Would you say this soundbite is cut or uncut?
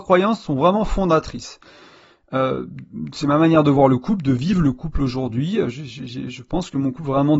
uncut